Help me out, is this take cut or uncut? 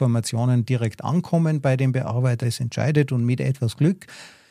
cut